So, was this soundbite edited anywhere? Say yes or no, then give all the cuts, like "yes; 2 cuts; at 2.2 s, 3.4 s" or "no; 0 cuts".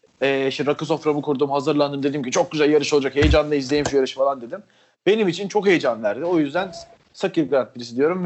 no; 0 cuts